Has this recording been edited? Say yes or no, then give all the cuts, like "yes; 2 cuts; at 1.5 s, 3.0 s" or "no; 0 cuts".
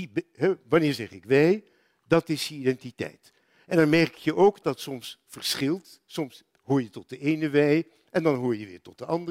yes; 1 cut; at 4.6 s